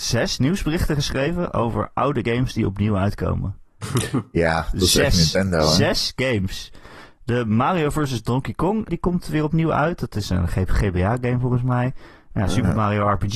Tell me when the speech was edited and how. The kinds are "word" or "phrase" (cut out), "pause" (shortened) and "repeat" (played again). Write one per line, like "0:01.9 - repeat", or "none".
0:08.9 - word